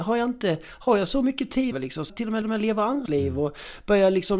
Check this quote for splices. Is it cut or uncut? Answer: cut